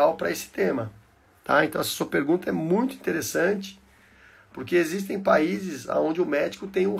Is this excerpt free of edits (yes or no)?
yes